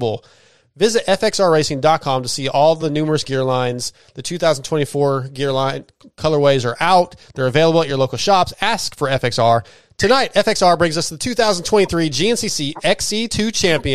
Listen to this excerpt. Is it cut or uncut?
uncut